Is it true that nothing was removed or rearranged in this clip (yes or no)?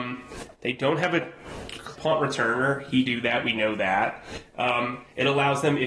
no